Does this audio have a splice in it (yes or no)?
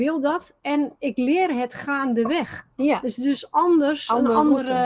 no